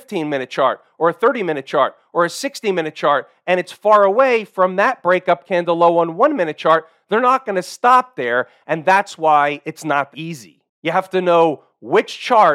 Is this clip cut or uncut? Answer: cut